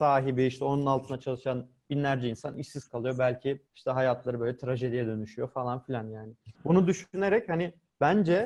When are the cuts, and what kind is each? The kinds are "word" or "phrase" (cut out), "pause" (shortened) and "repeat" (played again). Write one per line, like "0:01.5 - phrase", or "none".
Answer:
0:03.7 - pause
0:06.5 - pause